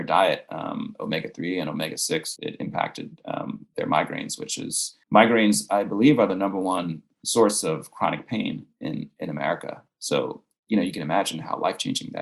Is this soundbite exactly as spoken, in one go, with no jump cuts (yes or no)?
no